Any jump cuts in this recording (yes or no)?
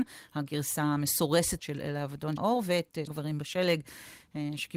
yes